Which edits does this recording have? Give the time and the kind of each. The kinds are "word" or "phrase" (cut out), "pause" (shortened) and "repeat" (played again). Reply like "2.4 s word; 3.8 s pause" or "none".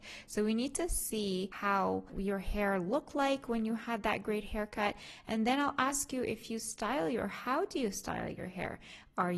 none